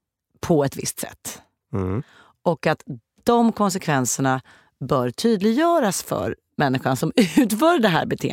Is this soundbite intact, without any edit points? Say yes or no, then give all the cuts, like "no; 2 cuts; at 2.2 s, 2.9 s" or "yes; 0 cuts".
yes; 0 cuts